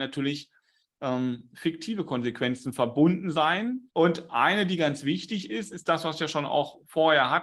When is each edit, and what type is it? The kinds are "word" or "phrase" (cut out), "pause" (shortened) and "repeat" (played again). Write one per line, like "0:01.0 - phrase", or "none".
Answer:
0:03.9 - pause